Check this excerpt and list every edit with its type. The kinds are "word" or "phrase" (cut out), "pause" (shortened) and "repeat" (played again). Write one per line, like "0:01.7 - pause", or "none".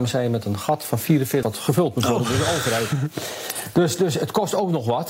0:01.4 - word